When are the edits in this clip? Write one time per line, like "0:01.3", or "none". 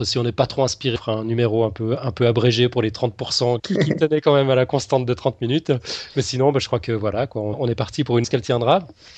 0:01.0
0:03.6
0:07.5
0:08.2

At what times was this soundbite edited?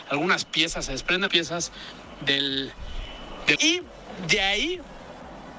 0:01.3
0:03.5

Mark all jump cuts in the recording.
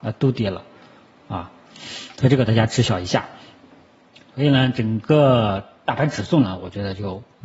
none

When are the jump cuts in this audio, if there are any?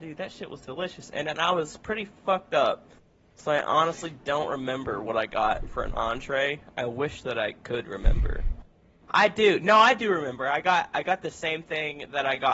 none

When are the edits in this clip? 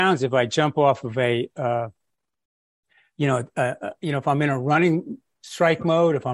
none

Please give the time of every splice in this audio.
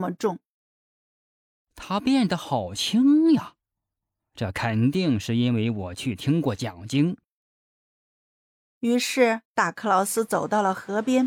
0:09.5

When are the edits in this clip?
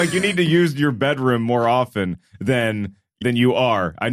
0:03.2

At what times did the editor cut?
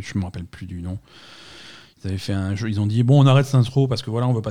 none

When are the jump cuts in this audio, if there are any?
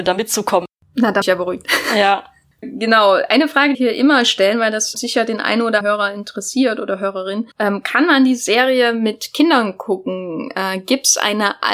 0:01.2
0:02.6
0:03.7
0:04.9
0:05.8
0:07.5

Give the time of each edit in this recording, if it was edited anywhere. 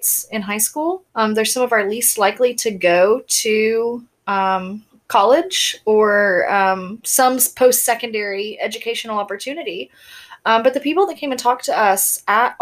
0:01.1
0:07.0

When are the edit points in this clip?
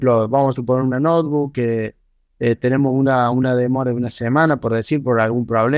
none

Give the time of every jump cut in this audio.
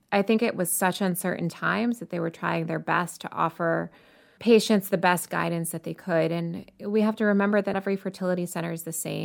0:04.4
0:07.7

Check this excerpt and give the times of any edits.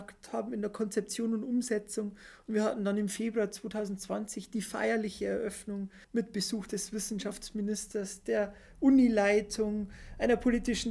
0:06.0

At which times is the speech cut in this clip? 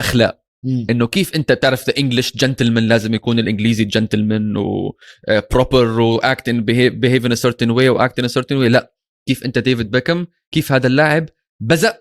none

